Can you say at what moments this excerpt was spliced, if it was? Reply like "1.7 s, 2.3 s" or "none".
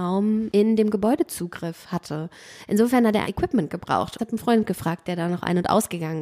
3.2 s, 4.2 s